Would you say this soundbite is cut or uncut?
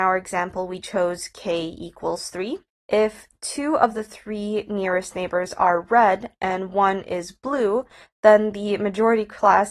uncut